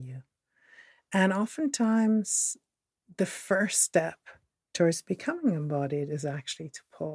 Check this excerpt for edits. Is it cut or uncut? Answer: uncut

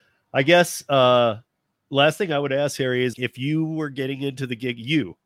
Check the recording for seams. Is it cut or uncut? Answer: cut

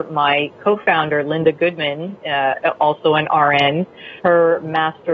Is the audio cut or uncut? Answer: cut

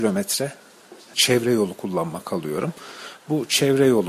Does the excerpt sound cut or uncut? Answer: cut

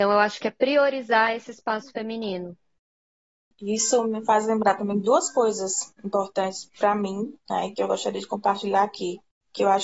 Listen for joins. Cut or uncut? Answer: uncut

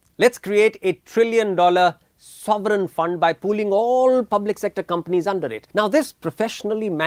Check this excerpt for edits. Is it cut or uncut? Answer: cut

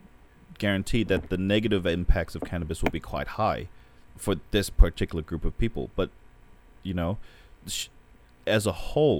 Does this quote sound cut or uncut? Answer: uncut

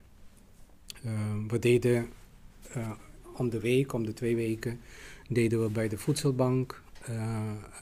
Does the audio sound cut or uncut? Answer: uncut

